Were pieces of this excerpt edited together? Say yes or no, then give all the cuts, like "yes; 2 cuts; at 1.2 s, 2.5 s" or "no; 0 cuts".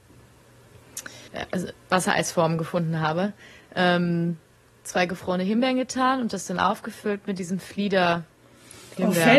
yes; 2 cuts; at 1.3 s, 4.6 s